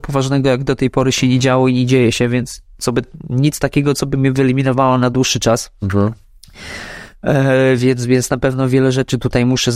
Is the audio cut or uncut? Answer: uncut